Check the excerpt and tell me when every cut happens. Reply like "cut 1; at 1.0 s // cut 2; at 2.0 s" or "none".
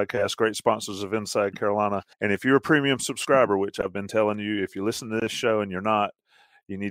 cut 1; at 2.1 s